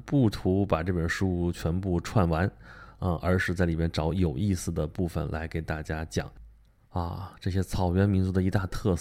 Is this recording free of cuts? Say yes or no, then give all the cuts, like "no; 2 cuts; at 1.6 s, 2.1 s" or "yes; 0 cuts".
yes; 0 cuts